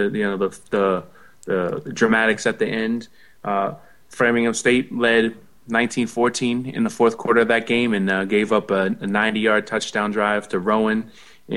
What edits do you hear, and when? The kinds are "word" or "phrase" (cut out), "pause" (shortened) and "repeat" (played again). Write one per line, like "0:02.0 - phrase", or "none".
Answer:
none